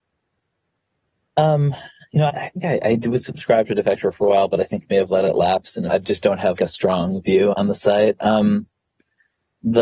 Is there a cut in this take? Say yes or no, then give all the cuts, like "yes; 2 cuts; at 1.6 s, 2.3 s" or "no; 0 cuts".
yes; 4 cuts; at 2.3 s, 5.9 s, 6.6 s, 7.5 s